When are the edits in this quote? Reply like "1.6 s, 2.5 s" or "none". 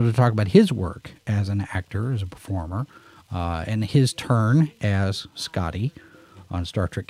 none